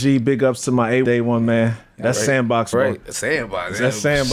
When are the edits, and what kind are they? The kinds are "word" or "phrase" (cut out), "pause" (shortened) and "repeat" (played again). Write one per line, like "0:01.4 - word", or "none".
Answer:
0:01.0 - word
0:02.7 - phrase